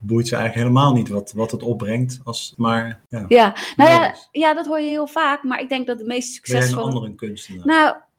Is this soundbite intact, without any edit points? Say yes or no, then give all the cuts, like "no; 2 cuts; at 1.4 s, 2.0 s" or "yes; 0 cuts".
yes; 0 cuts